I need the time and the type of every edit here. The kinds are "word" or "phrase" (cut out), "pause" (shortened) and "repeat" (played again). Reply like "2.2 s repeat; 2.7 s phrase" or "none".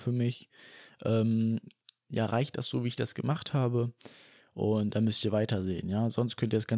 none